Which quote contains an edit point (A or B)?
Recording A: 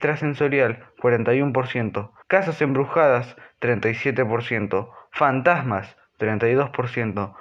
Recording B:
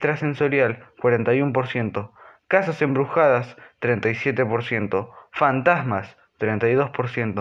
A